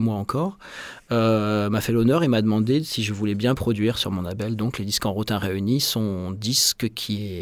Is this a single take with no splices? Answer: yes; 0 cuts

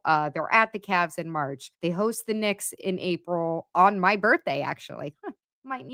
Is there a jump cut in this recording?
yes; 1 cut; at 1.7 s

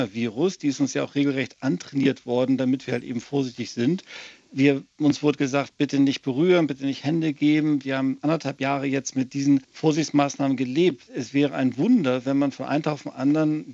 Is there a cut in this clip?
yes; 1 cut; at 9.6 s

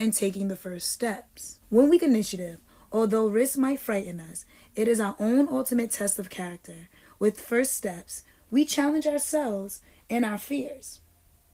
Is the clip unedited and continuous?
no; 2 cuts; at 1.6 s, 2.0 s

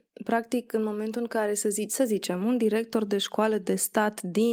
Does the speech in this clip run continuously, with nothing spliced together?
yes; 0 cuts

